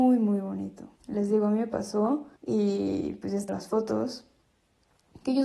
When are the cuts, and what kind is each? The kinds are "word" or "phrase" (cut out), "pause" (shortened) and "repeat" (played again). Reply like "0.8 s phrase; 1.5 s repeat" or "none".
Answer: 1.0 s pause; 2.4 s pause; 3.5 s word